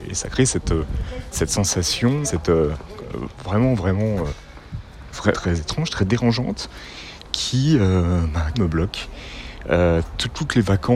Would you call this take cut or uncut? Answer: cut